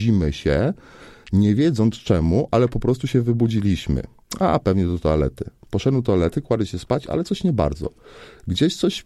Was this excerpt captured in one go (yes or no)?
yes